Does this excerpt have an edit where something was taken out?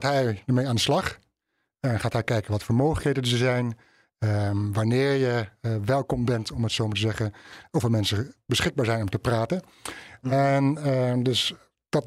no; 0 cuts

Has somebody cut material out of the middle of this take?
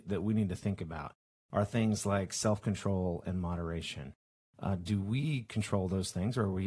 no; 0 cuts

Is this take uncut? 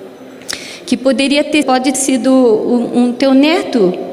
no; 2 cuts; at 1.6 s, 1.9 s

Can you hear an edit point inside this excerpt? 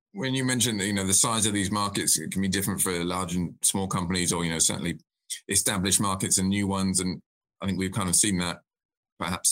no; 0 cuts

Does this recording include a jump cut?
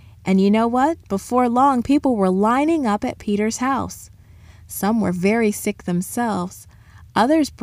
no; 0 cuts

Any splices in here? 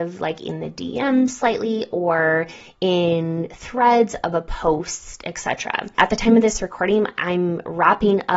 no; 0 cuts

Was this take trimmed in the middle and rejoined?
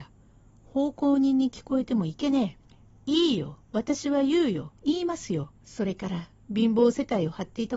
yes; 3 cuts; at 2.6 s, 4.8 s, 5.6 s

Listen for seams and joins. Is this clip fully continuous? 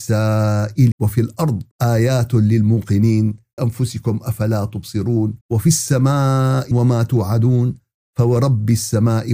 no; 5 cuts; at 0.9 s, 1.7 s, 3.6 s, 5.4 s, 6.7 s

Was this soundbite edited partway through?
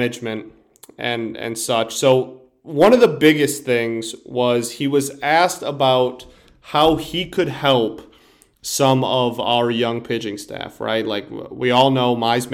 no; 0 cuts

